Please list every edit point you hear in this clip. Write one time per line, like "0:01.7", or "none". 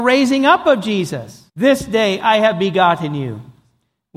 0:01.5